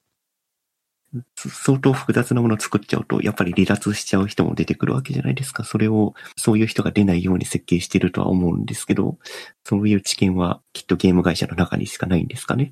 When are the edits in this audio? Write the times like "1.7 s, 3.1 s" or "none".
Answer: 1.3 s, 6.3 s, 9.5 s, 10.6 s

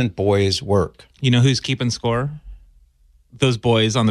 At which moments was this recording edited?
1.1 s

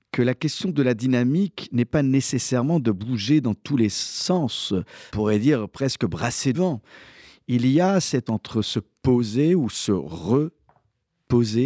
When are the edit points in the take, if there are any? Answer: 5.1 s, 6.5 s, 8.3 s

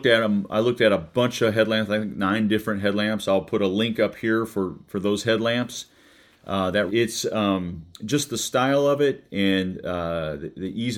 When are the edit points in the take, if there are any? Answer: 6.9 s, 7.9 s

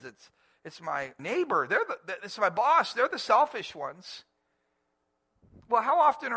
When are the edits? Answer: none

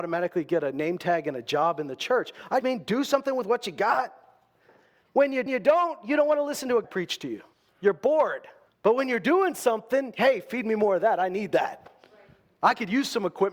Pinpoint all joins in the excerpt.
2.6 s, 5.5 s, 6.8 s, 7.5 s, 8.7 s

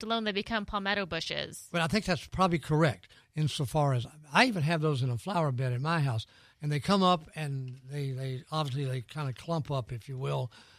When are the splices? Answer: none

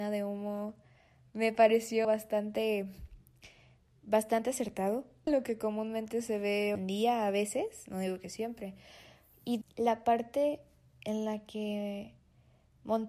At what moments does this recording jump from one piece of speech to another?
2.0 s, 5.3 s, 6.8 s, 9.6 s

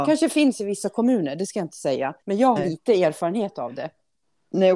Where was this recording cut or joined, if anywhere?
2.2 s, 2.6 s

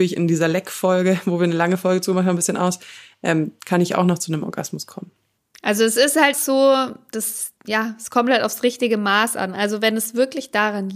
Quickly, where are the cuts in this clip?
6.3 s, 7.6 s

